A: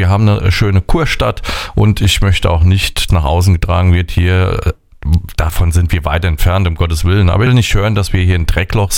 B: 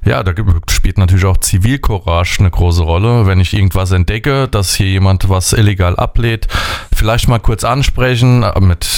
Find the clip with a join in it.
A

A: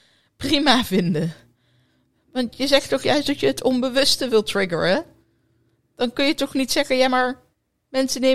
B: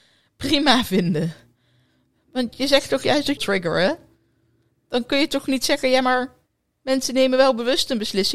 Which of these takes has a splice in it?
B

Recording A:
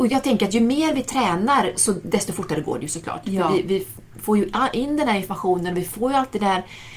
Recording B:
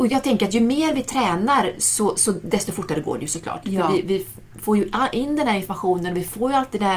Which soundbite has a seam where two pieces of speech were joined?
A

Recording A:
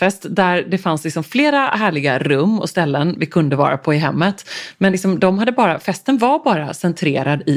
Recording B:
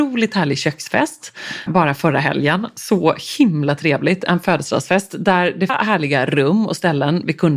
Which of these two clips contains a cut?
B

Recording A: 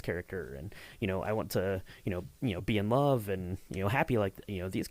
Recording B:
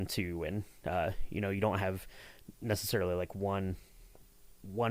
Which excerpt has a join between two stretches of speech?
A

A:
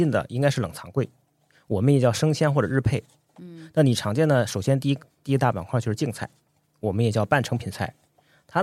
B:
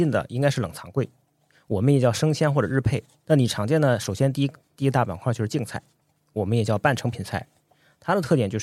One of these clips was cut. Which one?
B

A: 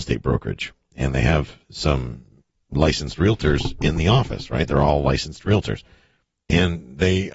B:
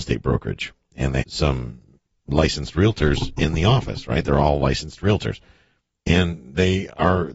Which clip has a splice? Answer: B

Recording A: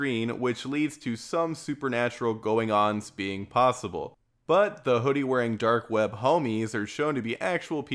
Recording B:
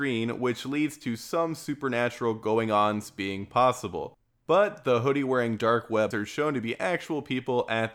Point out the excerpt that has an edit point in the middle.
B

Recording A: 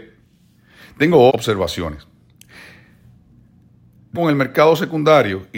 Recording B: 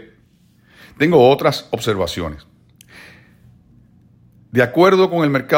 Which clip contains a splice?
A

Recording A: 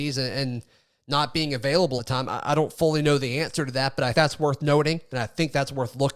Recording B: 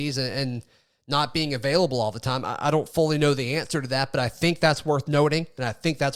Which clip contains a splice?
A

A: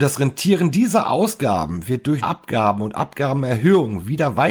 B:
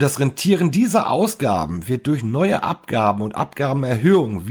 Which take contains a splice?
A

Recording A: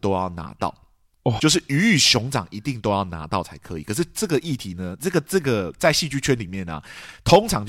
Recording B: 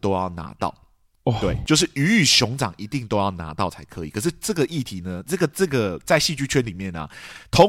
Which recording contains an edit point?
A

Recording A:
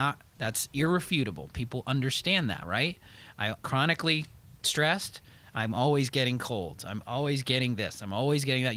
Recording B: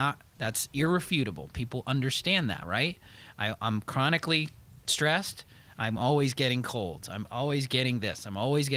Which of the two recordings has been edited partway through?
A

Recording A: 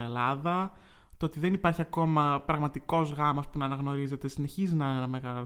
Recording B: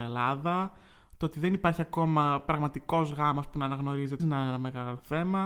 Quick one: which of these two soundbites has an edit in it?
B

